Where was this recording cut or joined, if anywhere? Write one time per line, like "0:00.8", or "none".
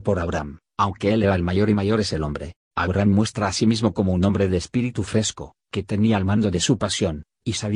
0:02.6